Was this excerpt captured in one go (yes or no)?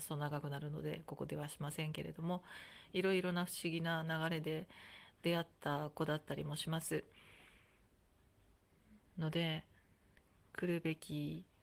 no